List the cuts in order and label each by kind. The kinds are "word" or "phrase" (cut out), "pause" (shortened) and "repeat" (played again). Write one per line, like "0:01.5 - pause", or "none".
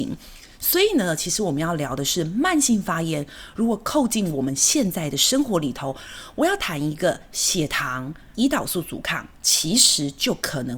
0:08.3 - phrase